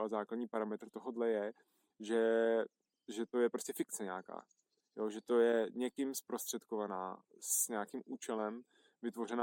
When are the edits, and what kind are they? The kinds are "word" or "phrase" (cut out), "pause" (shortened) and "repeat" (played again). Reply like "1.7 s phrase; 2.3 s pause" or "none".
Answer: none